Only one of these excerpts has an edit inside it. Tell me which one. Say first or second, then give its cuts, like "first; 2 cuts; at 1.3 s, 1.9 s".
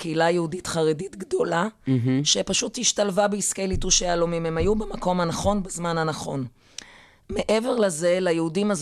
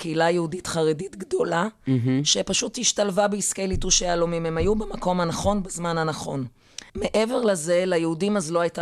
second; 1 cut; at 6.9 s